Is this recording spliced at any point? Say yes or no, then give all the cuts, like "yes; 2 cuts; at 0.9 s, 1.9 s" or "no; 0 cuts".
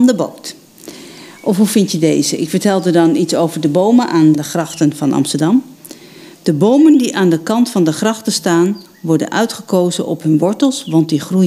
no; 0 cuts